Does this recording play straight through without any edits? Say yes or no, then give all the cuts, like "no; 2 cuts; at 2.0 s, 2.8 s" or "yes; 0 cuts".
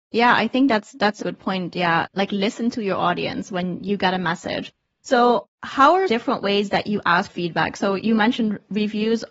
no; 5 cuts; at 1.2 s, 2.1 s, 5.5 s, 6.1 s, 7.3 s